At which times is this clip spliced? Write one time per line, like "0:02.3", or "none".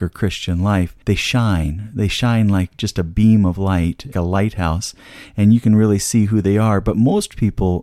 0:01.0
0:04.1